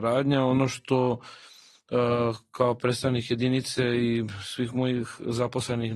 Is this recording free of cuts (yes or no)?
yes